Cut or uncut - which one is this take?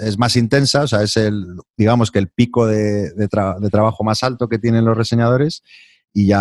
cut